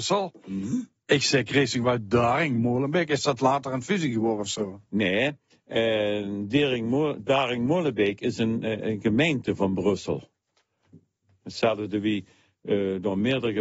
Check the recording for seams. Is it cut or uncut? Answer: uncut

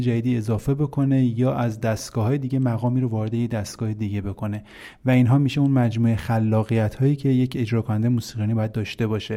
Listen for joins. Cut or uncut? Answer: uncut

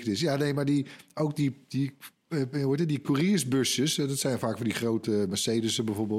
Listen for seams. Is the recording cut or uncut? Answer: uncut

